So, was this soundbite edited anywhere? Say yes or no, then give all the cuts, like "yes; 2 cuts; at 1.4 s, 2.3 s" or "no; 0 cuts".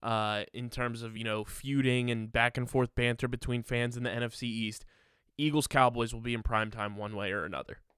no; 0 cuts